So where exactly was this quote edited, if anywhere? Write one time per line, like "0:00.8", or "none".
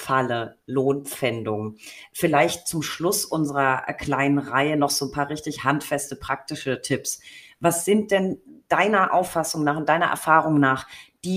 none